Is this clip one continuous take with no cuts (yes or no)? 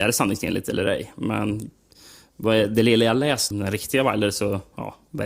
no